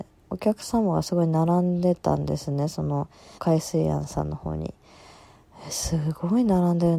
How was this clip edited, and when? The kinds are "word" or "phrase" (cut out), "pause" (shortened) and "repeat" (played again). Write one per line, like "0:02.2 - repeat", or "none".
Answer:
0:03.4 - phrase